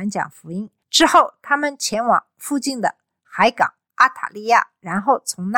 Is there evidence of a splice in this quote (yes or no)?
yes